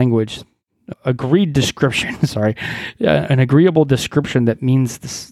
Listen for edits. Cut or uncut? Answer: cut